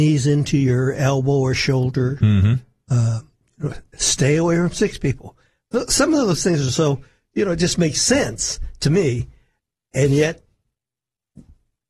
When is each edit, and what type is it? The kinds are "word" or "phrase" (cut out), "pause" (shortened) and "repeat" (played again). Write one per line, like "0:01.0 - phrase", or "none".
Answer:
none